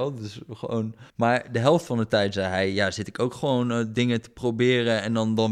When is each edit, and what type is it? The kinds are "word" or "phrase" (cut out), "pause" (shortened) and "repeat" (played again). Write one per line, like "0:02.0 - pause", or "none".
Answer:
0:01.1 - pause